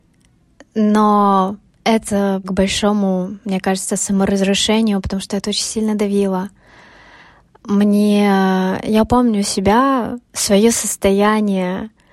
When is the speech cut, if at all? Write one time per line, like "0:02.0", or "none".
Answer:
0:02.4
0:10.3

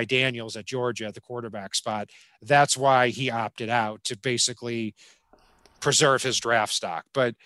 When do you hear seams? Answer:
none

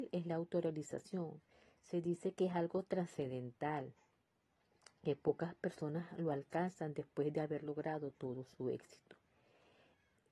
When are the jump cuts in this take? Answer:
none

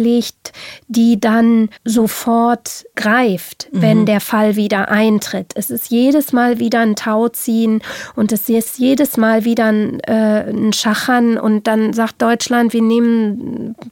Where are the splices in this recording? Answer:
0:01.8

